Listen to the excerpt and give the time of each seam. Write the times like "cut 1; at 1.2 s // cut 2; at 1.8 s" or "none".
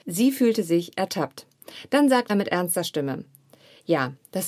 cut 1; at 2.3 s